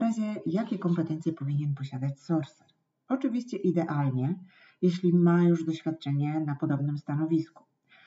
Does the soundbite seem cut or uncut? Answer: uncut